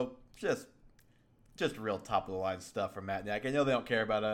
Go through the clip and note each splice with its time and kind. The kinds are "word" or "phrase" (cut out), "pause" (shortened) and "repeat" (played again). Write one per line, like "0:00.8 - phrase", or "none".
none